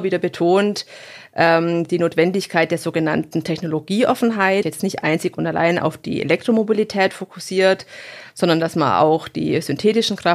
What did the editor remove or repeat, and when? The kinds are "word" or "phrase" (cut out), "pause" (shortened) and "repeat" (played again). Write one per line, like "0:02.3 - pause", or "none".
0:04.6 - phrase